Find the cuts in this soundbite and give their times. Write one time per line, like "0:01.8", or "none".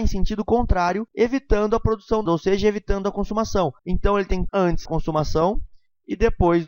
0:02.3
0:03.8
0:04.5
0:04.9